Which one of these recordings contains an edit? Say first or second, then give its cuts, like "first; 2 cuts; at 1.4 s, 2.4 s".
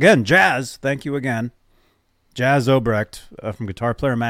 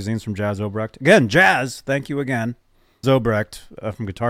second; 1 cut; at 3.0 s